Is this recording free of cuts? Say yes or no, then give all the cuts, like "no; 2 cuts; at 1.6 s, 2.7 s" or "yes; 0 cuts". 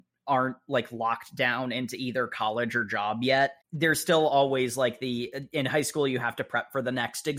no; 1 cut; at 3.6 s